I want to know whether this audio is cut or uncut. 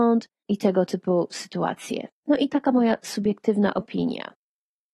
cut